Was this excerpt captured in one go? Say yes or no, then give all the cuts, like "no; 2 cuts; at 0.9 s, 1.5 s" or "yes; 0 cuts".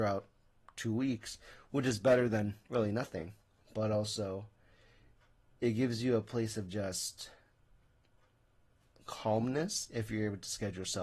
yes; 0 cuts